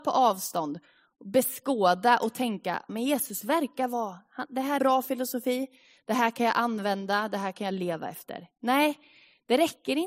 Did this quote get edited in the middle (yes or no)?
yes